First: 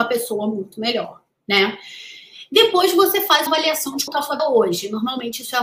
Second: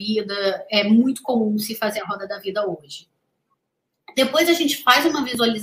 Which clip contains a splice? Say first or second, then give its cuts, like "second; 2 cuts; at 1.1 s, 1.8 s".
first; 4 cuts; at 1.3 s, 3.5 s, 4.1 s, 4.4 s